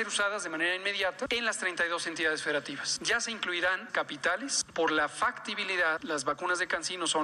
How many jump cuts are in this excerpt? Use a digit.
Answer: 1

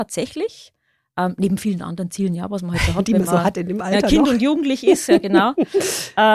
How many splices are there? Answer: 0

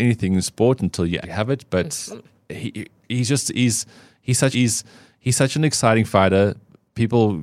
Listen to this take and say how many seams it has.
2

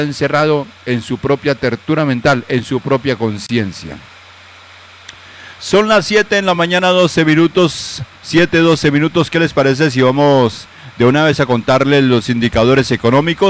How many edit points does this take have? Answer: 0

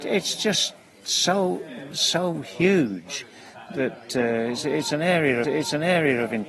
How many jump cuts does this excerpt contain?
2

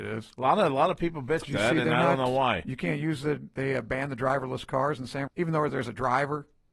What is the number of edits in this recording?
2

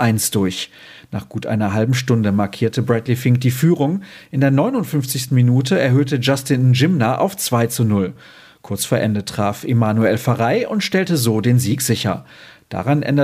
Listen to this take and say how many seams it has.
0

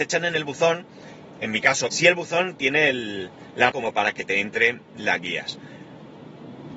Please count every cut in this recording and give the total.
2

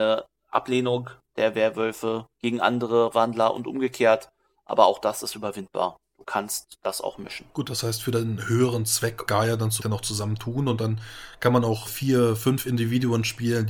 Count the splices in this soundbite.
5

